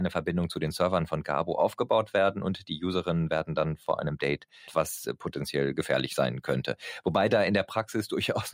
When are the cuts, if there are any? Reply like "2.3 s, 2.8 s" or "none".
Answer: 4.7 s